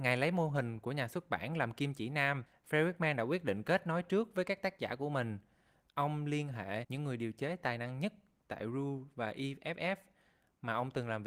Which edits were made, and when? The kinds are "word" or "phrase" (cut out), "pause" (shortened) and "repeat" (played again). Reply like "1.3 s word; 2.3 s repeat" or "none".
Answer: none